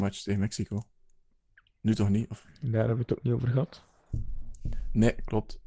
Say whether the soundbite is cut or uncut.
cut